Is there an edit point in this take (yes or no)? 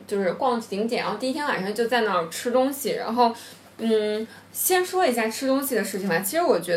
no